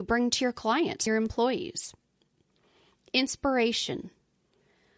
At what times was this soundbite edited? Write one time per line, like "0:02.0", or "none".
0:01.1